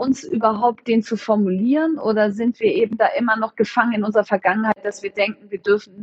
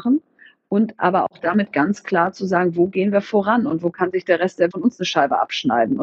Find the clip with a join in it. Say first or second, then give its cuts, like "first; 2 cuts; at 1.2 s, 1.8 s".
second; 1 cut; at 4.7 s